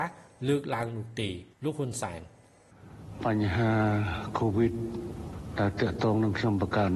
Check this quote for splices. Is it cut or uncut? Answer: cut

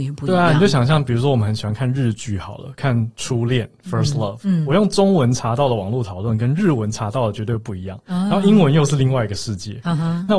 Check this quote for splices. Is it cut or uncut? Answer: uncut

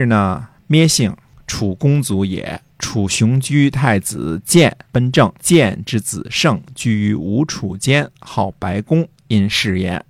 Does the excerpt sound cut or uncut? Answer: cut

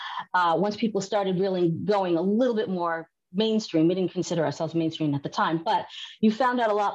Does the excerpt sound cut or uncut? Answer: uncut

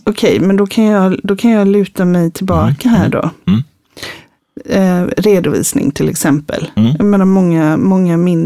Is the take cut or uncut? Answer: uncut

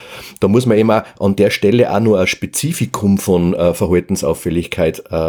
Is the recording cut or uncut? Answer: uncut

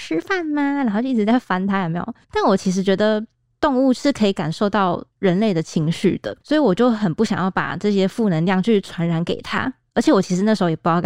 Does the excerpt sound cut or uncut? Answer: cut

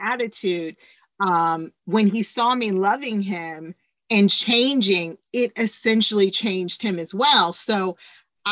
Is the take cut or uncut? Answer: uncut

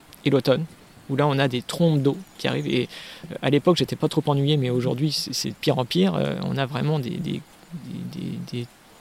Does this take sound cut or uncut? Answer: cut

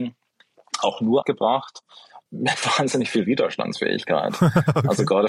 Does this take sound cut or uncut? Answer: cut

